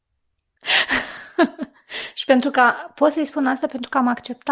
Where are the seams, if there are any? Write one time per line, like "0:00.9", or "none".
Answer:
none